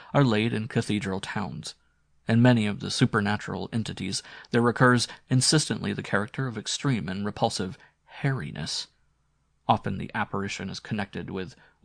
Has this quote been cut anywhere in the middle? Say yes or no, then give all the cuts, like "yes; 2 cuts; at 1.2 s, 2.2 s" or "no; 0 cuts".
no; 0 cuts